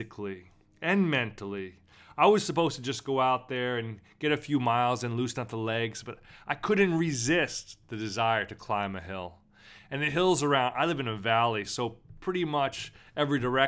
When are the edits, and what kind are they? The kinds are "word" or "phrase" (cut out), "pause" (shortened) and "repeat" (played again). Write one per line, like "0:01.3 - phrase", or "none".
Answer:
none